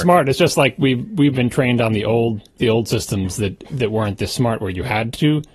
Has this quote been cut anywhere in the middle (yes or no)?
no